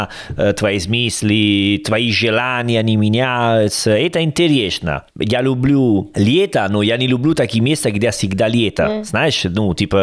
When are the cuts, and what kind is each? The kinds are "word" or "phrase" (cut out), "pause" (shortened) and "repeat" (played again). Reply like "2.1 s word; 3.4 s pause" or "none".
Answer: none

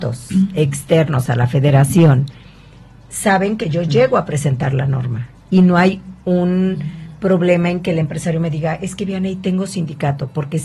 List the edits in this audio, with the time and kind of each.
none

